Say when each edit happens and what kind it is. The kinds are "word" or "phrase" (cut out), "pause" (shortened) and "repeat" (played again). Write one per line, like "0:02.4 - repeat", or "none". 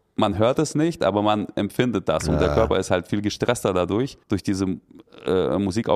0:04.2 - pause